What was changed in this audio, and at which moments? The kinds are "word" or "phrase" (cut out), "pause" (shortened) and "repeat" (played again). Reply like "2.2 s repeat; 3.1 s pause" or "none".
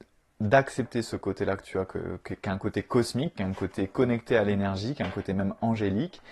none